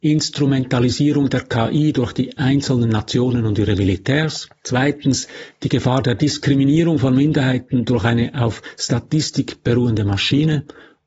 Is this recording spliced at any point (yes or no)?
yes